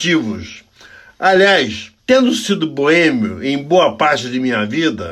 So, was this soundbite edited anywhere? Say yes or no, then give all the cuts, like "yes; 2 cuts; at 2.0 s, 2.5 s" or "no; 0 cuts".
yes; 1 cut; at 2.0 s